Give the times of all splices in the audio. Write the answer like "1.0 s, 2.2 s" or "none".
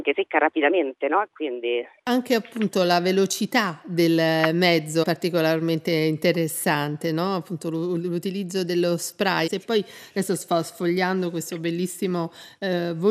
5.0 s, 9.5 s